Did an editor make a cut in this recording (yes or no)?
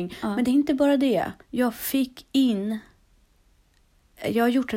yes